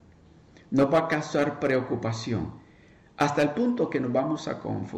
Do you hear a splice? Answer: no; 0 cuts

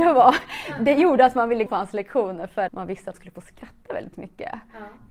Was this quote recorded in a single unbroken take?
no; 3 cuts; at 1.7 s, 2.7 s, 3.1 s

